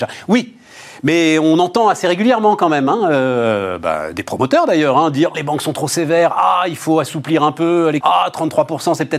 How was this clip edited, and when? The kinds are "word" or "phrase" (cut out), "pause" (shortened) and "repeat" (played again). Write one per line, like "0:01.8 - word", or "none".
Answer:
0:05.3 - word
0:08.0 - word